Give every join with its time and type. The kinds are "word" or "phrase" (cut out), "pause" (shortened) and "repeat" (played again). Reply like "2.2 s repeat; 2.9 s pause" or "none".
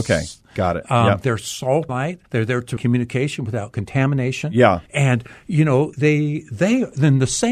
1.9 s word; 2.3 s pause; 2.8 s phrase; 4.9 s pause; 5.9 s word